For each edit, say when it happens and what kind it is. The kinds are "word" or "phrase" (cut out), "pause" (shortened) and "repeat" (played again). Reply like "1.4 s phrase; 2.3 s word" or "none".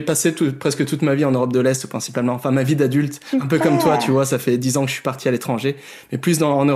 none